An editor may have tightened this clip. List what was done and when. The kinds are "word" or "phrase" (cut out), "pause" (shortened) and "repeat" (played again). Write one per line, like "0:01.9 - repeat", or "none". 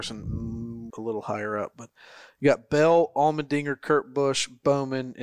0:00.9 - word